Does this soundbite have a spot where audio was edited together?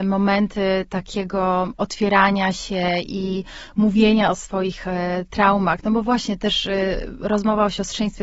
no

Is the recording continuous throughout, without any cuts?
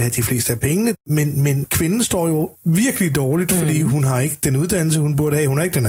no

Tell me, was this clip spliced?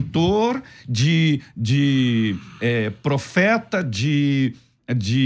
no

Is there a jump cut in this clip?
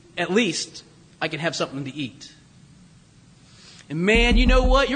no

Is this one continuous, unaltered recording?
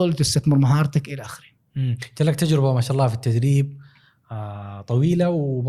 yes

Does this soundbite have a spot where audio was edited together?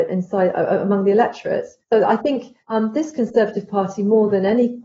yes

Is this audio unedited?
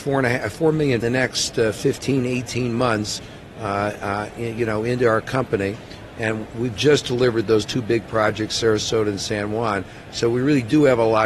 no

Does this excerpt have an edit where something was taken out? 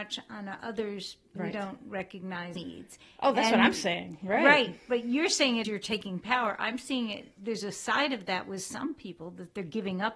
yes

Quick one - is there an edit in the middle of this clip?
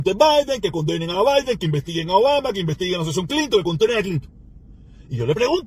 no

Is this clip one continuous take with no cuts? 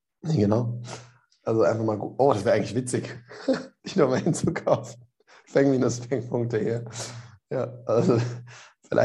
yes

